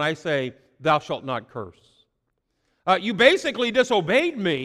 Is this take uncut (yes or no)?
yes